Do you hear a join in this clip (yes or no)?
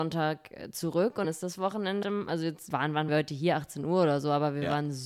yes